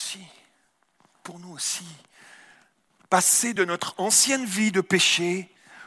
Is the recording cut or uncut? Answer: uncut